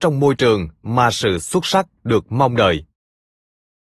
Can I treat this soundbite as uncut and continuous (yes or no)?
yes